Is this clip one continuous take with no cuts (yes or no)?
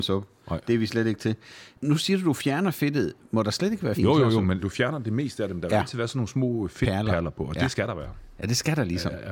no